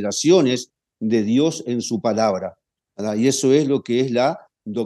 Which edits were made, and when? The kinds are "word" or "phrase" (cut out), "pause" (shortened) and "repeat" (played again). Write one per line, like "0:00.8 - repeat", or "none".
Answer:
none